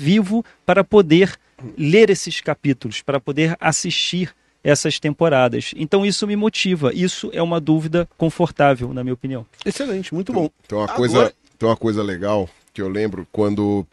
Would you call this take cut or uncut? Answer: uncut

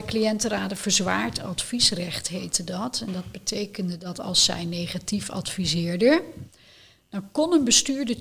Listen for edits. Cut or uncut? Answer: uncut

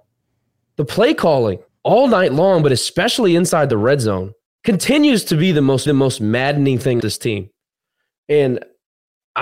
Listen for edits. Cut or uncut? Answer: cut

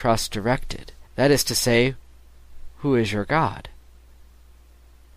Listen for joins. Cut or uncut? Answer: cut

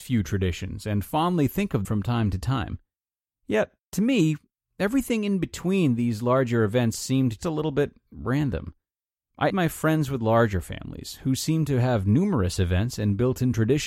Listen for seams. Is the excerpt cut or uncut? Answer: cut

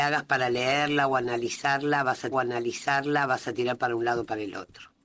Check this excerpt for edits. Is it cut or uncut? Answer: cut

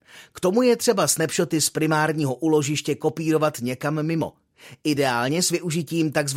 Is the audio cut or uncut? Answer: uncut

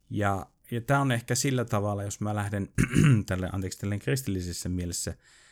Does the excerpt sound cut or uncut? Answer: uncut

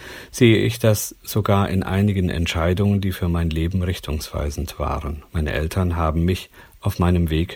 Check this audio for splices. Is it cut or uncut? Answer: cut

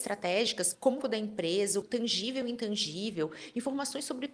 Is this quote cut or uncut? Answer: cut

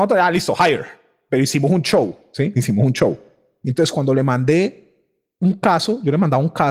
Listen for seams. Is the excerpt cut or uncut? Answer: uncut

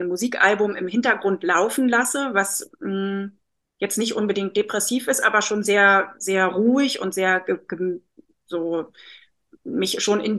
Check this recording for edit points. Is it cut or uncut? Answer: uncut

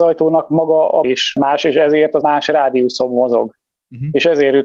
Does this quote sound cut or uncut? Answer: cut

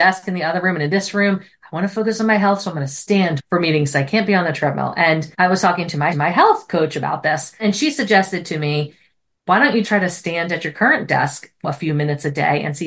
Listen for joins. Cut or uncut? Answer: cut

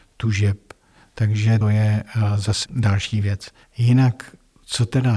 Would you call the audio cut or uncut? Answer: cut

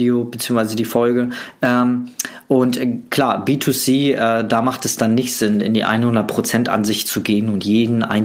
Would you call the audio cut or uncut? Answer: uncut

